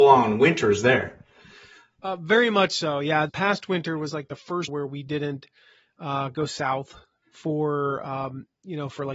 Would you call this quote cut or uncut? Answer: cut